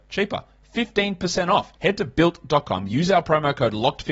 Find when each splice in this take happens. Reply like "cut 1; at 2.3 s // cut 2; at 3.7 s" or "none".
cut 1; at 1.7 s